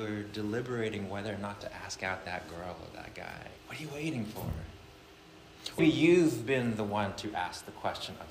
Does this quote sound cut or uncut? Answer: cut